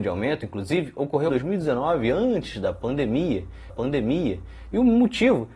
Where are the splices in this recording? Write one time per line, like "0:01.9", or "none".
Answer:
0:01.3
0:03.7